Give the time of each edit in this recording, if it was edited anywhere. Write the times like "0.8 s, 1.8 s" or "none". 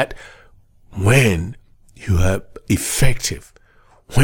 1.7 s

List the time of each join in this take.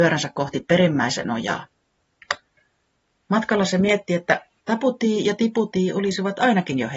none

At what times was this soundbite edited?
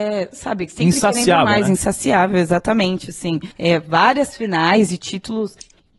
3.5 s

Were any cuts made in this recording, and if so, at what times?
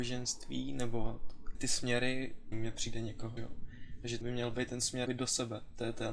1.5 s, 2.5 s, 3.4 s, 4.2 s, 5.1 s

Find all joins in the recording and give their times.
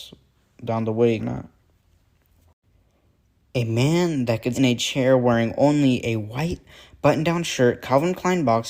1.2 s, 4.5 s

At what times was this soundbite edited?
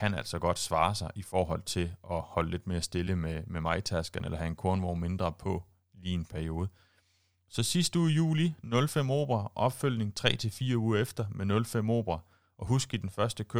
none

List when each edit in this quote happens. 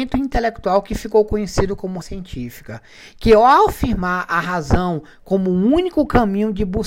2.0 s

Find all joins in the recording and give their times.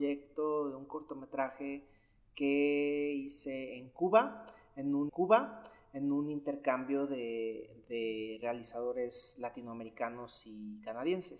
5.1 s

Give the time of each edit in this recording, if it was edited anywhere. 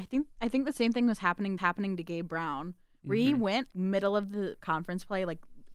1.6 s, 3.7 s, 4.6 s

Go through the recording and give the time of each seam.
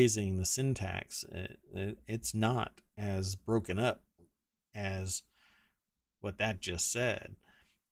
none

